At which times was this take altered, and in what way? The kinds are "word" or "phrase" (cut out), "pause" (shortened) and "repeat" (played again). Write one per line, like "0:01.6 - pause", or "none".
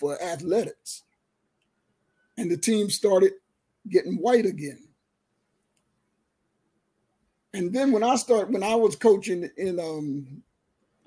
none